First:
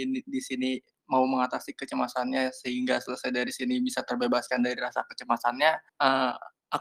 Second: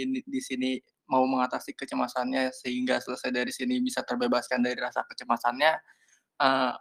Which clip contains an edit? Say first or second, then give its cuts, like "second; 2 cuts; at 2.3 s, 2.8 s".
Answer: first; 1 cut; at 5.9 s